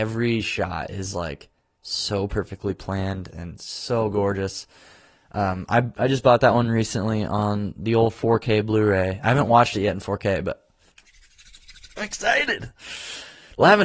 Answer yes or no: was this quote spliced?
no